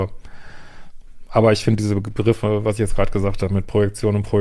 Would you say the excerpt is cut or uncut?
uncut